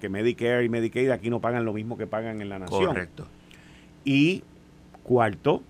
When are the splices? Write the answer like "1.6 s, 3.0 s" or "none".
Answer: none